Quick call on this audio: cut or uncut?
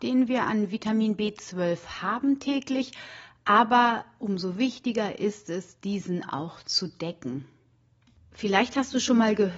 uncut